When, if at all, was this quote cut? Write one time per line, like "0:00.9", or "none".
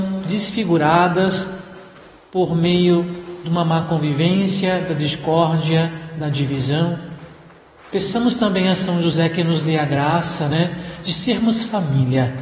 none